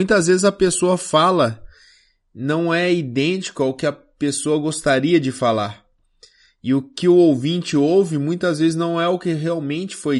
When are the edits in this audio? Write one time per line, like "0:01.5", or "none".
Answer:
none